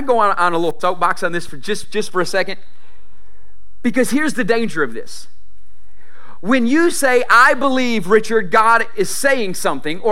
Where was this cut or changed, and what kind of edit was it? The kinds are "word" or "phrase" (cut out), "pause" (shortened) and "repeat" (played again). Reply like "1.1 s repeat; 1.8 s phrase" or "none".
none